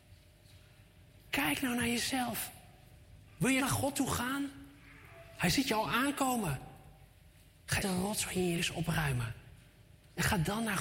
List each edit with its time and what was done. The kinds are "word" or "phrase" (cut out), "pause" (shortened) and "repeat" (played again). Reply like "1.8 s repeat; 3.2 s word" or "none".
3.6 s word; 7.8 s word; 8.6 s word